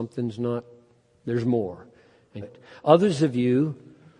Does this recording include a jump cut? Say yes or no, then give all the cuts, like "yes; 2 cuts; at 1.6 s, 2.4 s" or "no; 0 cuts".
yes; 1 cut; at 2.4 s